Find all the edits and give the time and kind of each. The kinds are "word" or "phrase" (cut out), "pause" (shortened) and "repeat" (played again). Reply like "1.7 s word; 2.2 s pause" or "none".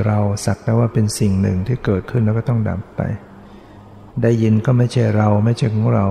4.1 s pause